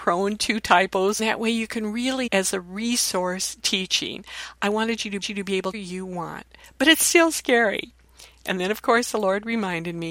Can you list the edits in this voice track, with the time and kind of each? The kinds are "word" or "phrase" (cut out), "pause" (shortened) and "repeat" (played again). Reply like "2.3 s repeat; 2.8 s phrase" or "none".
1.2 s phrase; 2.3 s phrase; 5.2 s repeat; 5.7 s phrase

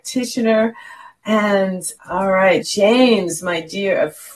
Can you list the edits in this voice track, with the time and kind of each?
2.0 s word; 2.6 s word

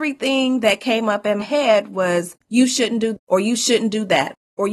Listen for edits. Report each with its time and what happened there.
1.4 s word; 2.4 s pause; 3.2 s word

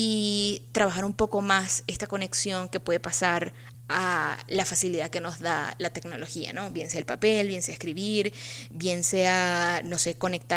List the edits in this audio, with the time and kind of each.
3.7 s phrase

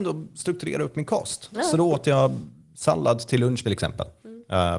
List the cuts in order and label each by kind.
2.6 s pause; 3.6 s phrase

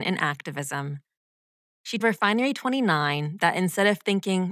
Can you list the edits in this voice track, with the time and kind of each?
2.0 s word

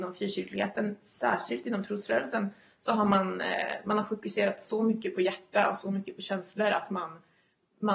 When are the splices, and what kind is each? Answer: none

